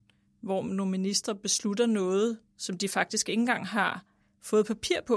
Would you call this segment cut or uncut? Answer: uncut